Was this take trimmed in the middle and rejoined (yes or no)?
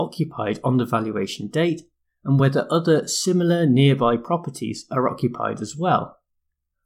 no